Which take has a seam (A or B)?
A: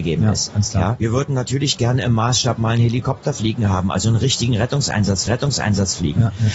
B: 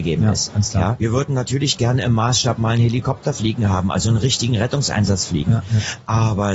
A